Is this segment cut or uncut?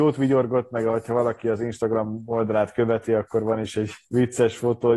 cut